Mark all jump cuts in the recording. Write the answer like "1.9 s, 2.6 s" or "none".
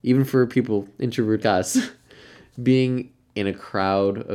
1.4 s